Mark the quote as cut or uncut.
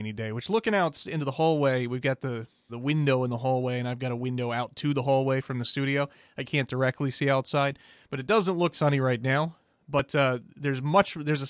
cut